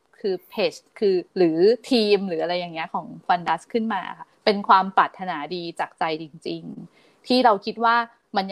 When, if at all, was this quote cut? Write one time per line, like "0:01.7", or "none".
0:01.3
0:03.3
0:04.3